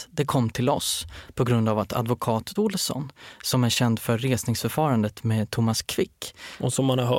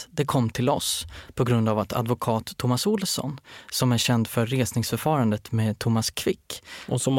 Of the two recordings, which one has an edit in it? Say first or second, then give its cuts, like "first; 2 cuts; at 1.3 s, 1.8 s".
first; 1 cut; at 2.6 s